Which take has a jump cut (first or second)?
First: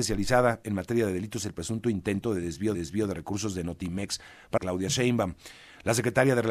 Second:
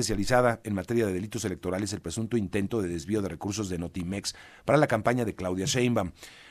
first